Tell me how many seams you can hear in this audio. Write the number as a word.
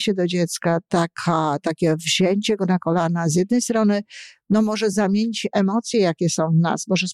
zero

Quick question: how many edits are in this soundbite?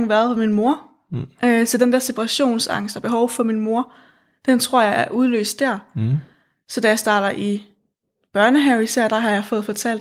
zero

